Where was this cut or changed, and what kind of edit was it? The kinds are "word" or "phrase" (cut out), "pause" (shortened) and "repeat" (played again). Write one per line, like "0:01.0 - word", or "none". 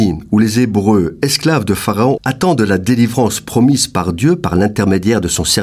0:02.2 - phrase

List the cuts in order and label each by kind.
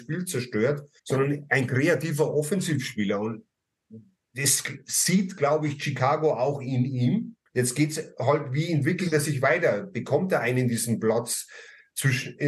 0:01.0 - pause
0:07.5 - pause

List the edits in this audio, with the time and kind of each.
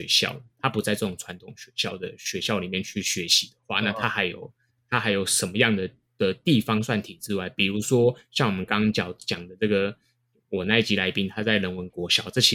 none

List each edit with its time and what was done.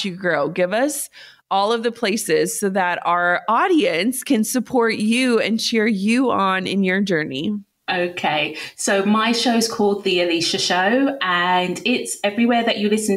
none

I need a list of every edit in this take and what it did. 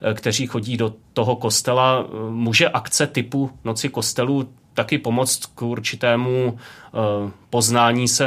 none

